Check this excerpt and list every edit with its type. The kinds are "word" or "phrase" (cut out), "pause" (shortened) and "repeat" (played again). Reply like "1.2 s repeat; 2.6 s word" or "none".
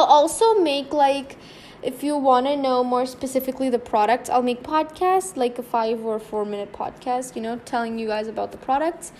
4.6 s phrase